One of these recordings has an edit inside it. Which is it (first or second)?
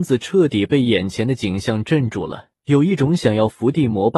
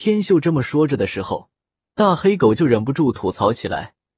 first